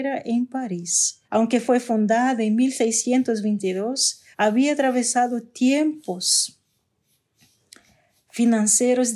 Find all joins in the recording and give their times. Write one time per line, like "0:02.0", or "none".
0:01.2
0:04.3